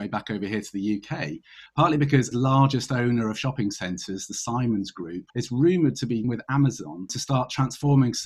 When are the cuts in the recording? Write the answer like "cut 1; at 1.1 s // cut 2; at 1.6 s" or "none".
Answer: cut 1; at 1.7 s // cut 2; at 2.3 s // cut 3; at 5.3 s // cut 4; at 6.2 s